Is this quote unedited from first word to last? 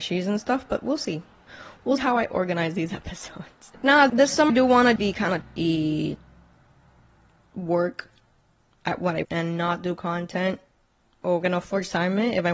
no; 7 cuts; at 2.0 s, 4.1 s, 4.5 s, 5.0 s, 5.4 s, 9.2 s, 11.4 s

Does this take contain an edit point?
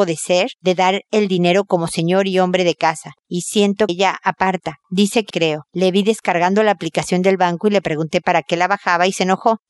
yes; 2 cuts; at 3.9 s, 5.3 s

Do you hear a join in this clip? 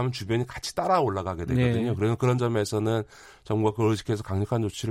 no; 0 cuts

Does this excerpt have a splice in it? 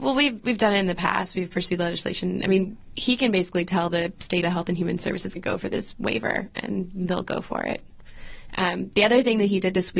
yes; 2 cuts; at 4.4 s, 5.4 s

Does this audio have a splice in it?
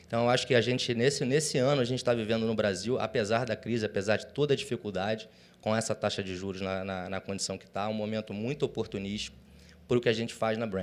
no; 0 cuts

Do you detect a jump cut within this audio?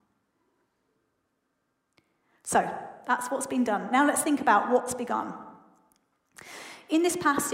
no; 0 cuts

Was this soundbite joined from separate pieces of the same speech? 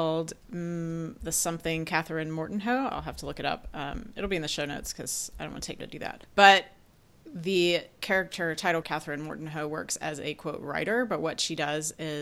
yes; 3 cuts; at 5.8 s, 6.2 s, 8.8 s

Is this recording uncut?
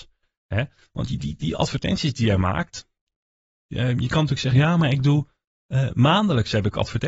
yes; 0 cuts

